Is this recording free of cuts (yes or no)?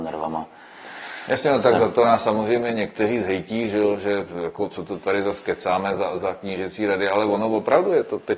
yes